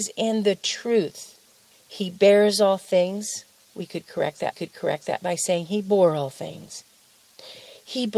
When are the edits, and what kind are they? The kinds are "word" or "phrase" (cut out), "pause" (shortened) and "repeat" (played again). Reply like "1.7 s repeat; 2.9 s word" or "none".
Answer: 1.7 s pause; 4.5 s repeat